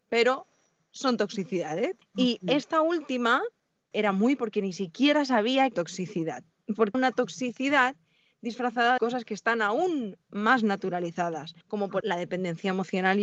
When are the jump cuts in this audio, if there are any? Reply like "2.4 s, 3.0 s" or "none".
2.0 s, 3.9 s, 4.4 s, 5.7 s, 6.9 s, 9.0 s, 11.6 s, 12.0 s